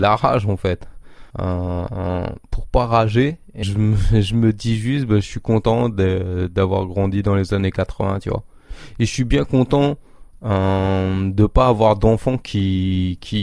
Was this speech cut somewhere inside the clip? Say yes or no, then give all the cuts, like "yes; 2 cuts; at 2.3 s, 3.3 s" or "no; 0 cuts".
yes; 2 cuts; at 1.3 s, 3.6 s